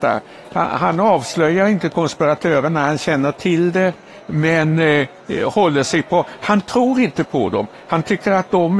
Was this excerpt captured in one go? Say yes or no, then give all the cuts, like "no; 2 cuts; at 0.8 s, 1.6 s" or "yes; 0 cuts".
yes; 0 cuts